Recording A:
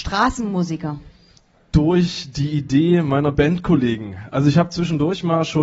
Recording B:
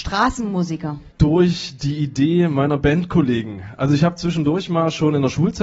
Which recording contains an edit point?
B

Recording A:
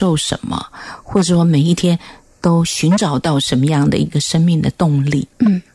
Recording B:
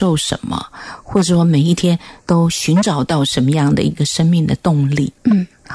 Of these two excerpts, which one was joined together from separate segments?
B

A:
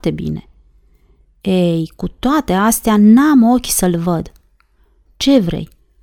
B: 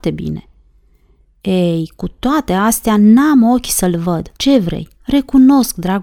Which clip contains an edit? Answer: B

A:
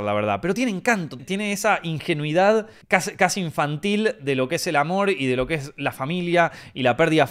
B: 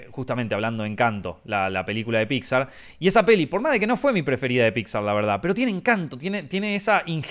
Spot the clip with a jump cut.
A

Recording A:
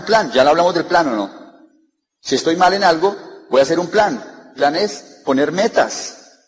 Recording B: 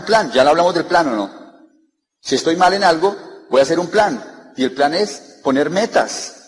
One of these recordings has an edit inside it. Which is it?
A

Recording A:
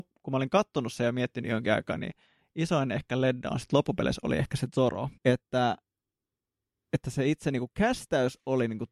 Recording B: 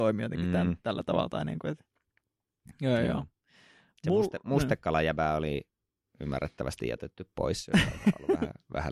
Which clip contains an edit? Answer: A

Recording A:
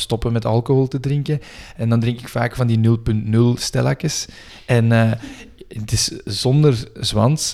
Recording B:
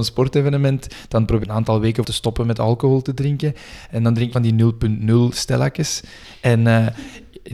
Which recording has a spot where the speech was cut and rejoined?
B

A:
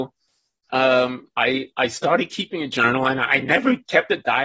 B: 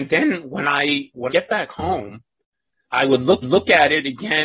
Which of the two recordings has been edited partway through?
B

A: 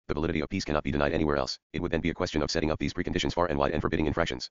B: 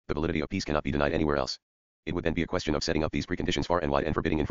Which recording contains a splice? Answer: A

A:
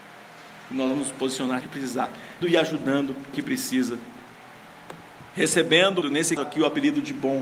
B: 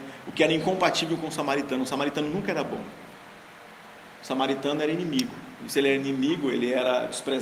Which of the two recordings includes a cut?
A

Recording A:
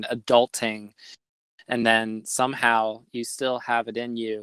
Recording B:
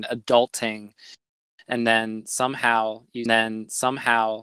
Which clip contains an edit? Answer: B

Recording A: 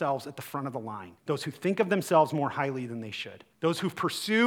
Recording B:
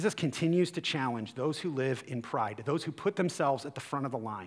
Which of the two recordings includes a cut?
A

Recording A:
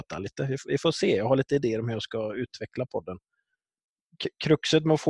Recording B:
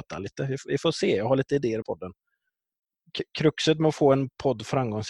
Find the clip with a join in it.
B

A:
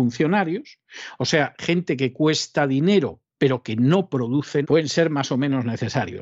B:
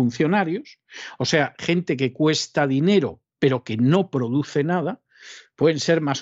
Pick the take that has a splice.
A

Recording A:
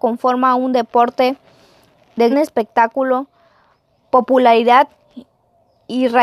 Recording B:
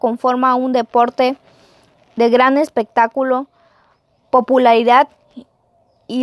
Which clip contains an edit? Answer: A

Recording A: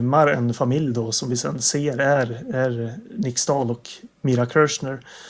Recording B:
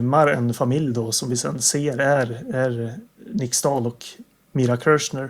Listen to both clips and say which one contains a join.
A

